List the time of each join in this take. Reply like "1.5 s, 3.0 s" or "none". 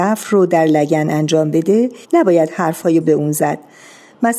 2.0 s, 3.0 s